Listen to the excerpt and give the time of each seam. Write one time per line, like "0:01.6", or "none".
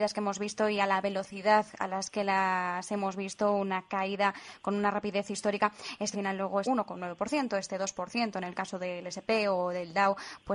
0:06.1
0:06.6